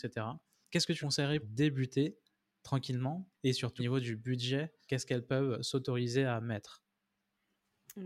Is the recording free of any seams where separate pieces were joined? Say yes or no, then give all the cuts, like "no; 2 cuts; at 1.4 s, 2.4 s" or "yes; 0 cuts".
no; 6 cuts; at 1.0 s, 1.4 s, 3.3 s, 3.8 s, 4.9 s, 5.5 s